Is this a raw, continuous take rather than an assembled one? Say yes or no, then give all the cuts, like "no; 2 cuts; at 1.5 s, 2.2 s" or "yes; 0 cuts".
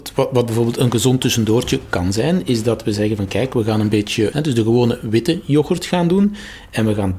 no; 1 cut; at 4.3 s